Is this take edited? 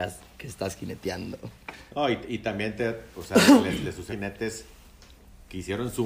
yes; 2 cuts; at 3.1 s, 4.1 s

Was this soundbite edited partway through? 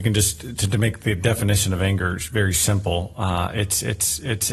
no; 0 cuts

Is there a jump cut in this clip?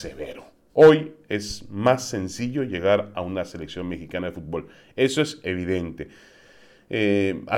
no; 0 cuts

